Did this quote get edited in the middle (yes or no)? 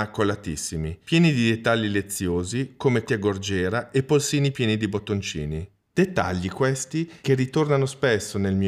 yes